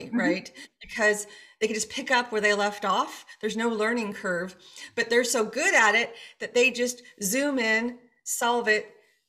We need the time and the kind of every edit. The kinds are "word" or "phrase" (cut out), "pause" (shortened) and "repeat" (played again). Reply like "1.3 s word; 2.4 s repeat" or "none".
none